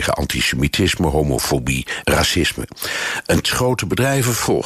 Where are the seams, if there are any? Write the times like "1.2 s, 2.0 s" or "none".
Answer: 2.0 s, 3.4 s